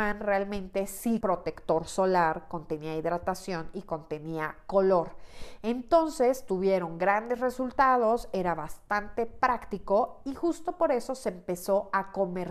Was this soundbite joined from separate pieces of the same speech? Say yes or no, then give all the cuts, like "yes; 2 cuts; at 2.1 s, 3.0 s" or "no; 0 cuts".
yes; 1 cut; at 1.2 s